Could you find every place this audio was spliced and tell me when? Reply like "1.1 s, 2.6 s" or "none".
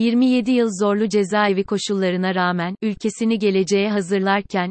none